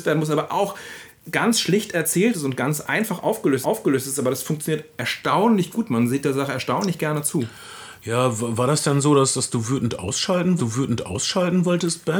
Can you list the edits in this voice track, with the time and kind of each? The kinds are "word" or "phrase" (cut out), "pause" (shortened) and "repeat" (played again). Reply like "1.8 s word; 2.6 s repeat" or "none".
1.2 s word; 3.6 s repeat; 10.6 s repeat